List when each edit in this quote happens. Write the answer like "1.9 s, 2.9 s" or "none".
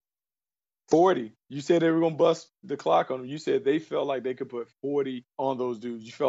5.3 s